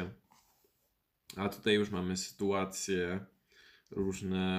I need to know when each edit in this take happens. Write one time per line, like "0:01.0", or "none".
none

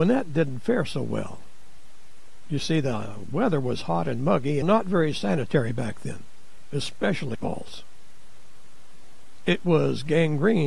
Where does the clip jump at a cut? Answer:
0:04.6
0:07.3

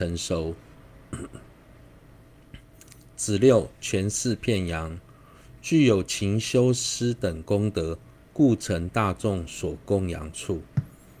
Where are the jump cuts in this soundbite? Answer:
none

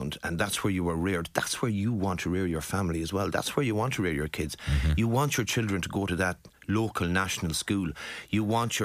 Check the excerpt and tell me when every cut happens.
none

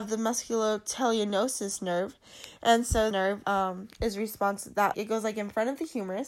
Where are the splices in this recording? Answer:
0:03.1
0:03.4
0:04.9

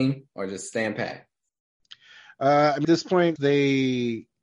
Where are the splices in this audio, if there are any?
0:02.8
0:03.4

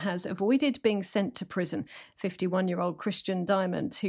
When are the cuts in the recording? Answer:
none

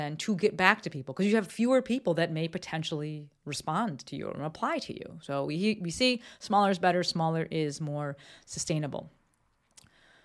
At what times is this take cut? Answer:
none

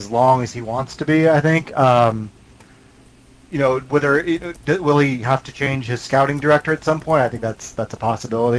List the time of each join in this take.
none

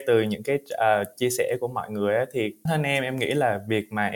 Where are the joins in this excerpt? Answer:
0:02.7

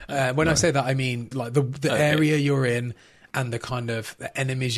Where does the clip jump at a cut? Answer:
0:01.3

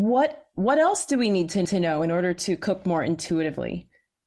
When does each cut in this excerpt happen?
0:01.6

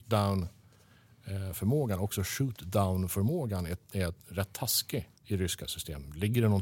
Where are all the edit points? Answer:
0:05.2

